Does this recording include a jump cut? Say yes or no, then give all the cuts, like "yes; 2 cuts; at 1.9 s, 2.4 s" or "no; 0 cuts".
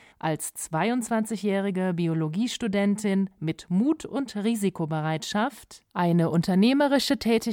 no; 0 cuts